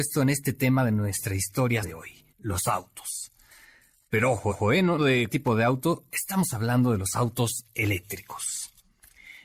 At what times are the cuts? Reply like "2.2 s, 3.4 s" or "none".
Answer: 1.8 s, 2.3 s, 4.5 s, 5.0 s, 5.3 s